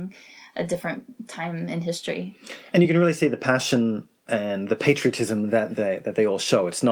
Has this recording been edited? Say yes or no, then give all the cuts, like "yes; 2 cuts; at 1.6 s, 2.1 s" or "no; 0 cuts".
no; 0 cuts